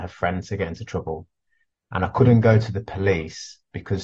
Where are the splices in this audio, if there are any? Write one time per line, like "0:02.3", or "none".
none